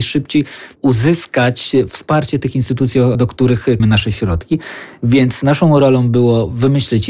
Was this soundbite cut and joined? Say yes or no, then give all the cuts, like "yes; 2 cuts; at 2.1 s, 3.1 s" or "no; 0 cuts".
yes; 2 cuts; at 3.1 s, 3.8 s